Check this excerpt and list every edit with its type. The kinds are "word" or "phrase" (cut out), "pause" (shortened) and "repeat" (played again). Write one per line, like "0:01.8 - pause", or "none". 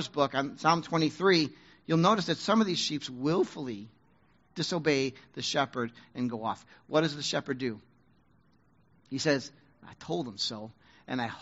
none